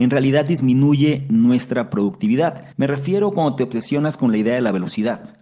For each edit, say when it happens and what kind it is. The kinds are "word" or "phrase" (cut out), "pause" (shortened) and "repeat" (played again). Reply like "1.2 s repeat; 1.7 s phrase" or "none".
2.7 s pause